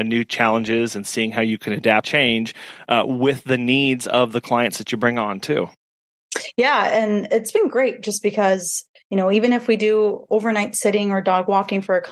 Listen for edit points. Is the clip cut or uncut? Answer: cut